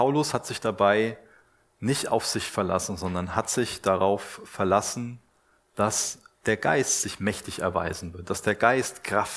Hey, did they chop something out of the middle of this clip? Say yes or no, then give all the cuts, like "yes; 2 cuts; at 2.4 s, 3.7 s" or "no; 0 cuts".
no; 0 cuts